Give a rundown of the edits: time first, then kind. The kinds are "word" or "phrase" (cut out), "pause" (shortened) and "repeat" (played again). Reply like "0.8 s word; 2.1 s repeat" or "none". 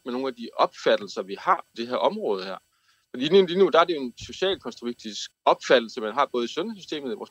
1.7 s word; 5.3 s word